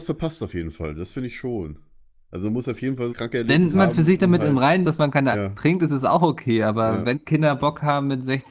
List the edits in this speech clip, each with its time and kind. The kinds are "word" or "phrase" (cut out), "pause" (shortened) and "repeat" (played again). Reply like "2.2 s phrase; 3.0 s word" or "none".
3.1 s word; 3.7 s word; 4.8 s word; 5.3 s word; 7.1 s word

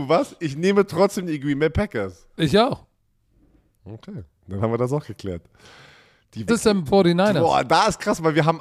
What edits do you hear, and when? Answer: 2.3 s pause; 6.5 s word; 6.9 s word

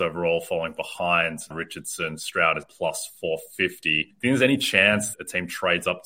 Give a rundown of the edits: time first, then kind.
1.5 s word; 2.6 s word; 4.1 s word; 5.1 s word

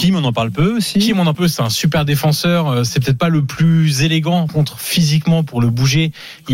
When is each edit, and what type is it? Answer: 1.3 s word; 4.5 s word

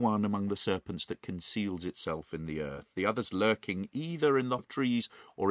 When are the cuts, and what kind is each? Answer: 4.6 s word

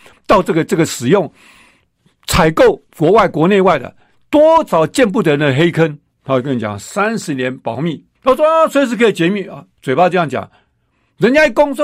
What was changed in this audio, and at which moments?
2.9 s pause; 8.1 s pause

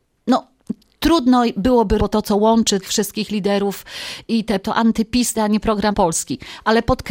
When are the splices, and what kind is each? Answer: 2.0 s word; 2.8 s word; 4.6 s word; 5.3 s word; 5.9 s word

